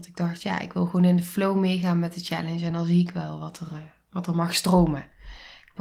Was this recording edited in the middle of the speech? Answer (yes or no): no